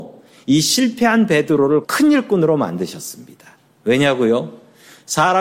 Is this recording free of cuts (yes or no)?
no